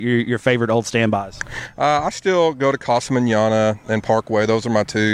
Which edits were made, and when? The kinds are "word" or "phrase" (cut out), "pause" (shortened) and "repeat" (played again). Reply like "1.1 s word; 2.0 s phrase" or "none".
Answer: none